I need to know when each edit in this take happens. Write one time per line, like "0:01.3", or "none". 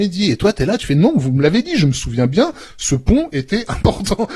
none